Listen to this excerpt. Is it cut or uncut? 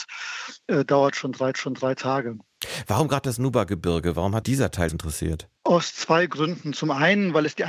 cut